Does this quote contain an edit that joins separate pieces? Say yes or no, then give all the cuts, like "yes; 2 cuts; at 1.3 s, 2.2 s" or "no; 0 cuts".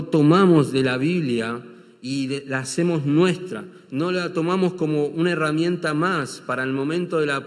no; 0 cuts